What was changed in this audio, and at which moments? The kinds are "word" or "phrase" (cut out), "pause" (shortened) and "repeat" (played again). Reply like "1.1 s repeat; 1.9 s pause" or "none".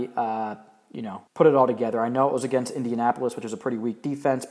1.3 s pause